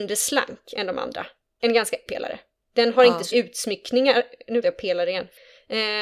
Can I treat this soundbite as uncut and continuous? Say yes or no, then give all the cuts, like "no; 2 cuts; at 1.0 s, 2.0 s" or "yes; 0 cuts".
no; 4 cuts; at 1.6 s, 2.1 s, 3.3 s, 4.6 s